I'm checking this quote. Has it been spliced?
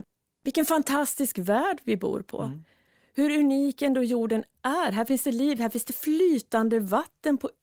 no; 0 cuts

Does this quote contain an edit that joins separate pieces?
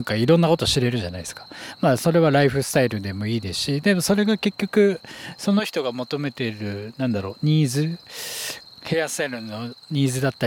no; 0 cuts

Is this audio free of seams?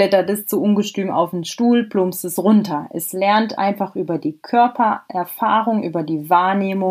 yes; 0 cuts

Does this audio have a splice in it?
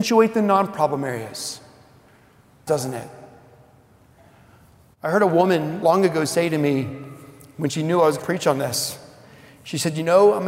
yes; 3 cuts; at 2.7 s, 5.8 s, 8.2 s

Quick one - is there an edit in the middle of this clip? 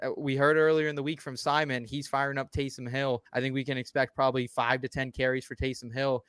yes; 1 cut; at 3.3 s

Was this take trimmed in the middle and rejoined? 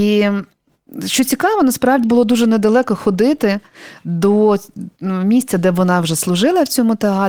yes; 1 cut; at 2.0 s

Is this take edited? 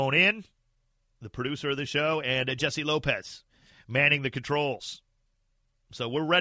no; 0 cuts

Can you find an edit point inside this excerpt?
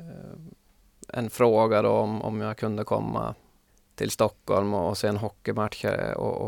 yes; 1 cut; at 3.7 s

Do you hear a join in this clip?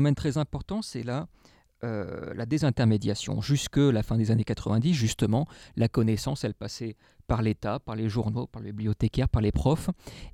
no; 0 cuts

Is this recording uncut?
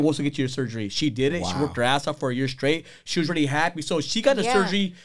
yes; 0 cuts

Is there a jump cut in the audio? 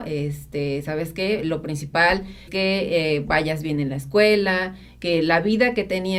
yes; 1 cut; at 2.5 s

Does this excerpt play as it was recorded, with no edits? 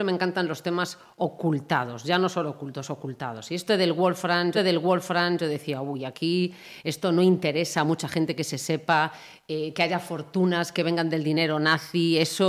no; 1 cut; at 4.6 s

